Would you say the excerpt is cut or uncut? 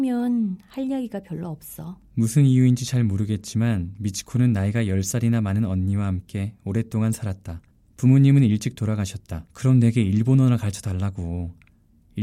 cut